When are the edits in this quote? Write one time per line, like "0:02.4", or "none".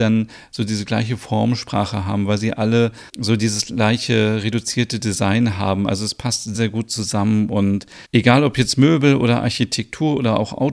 0:03.1
0:06.5
0:08.0